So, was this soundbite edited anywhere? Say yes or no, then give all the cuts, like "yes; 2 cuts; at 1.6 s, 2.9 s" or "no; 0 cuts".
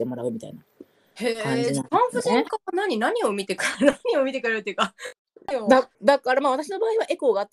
yes; 1 cut; at 5.9 s